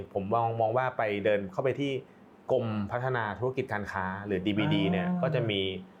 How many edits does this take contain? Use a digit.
0